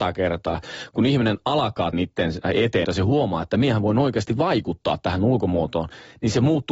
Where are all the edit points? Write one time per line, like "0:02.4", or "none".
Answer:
0:01.9
0:02.8